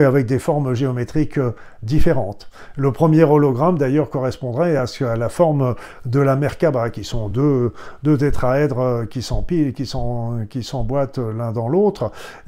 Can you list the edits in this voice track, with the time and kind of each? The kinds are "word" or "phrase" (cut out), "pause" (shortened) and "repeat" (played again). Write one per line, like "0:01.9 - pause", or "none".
none